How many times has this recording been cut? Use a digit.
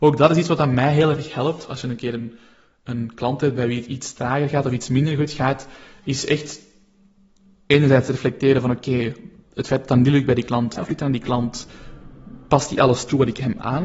1